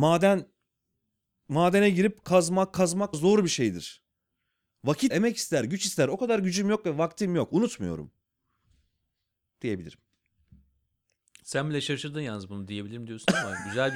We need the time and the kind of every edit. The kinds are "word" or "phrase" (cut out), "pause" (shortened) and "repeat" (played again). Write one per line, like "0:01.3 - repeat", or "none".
0:02.2 - word
0:03.1 - word
0:05.1 - word

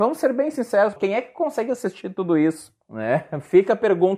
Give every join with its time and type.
0:01.0 - word
0:02.8 - pause

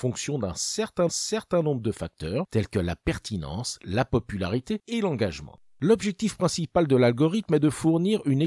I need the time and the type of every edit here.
0:01.1 - repeat

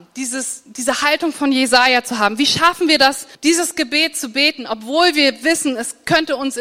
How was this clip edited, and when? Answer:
0:03.3 - pause

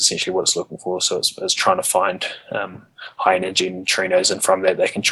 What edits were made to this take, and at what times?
none

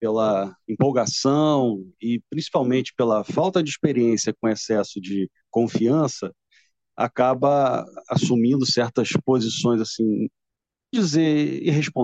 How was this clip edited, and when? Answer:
none

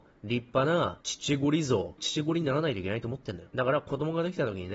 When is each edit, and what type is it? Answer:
0:02.0 - word

